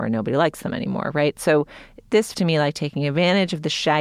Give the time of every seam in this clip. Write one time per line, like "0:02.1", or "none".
0:02.3

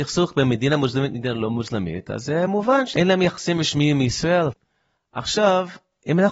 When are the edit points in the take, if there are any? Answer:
none

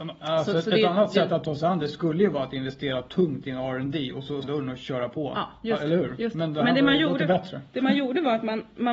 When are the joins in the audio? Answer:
0:04.4

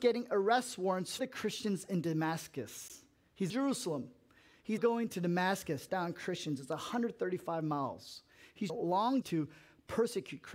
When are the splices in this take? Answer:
0:01.2
0:03.5
0:04.8
0:05.9
0:08.7
0:09.2

